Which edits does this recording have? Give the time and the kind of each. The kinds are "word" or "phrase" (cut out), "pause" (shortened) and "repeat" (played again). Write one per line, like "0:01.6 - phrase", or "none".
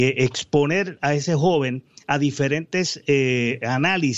none